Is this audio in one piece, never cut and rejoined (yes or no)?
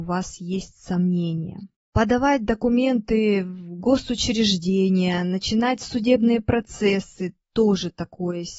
yes